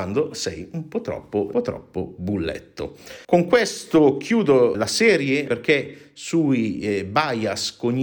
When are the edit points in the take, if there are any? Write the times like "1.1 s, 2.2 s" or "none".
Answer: 1.5 s, 3.2 s, 4.7 s, 5.5 s